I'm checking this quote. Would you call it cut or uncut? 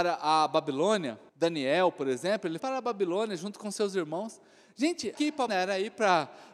cut